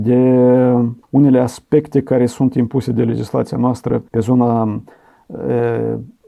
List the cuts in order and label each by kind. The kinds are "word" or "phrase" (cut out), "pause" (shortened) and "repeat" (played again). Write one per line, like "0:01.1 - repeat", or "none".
0:01.0 - pause
0:04.1 - pause